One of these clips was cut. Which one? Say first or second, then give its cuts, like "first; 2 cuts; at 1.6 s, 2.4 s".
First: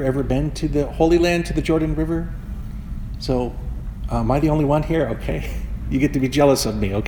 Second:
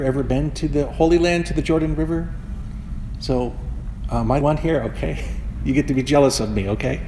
second; 1 cut; at 4.4 s